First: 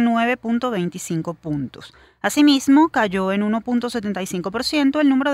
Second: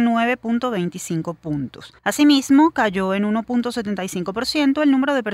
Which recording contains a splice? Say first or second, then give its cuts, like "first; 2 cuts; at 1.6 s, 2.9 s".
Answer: second; 1 cut; at 2.0 s